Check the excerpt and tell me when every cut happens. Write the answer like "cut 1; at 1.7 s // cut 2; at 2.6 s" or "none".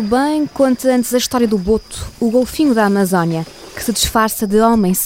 none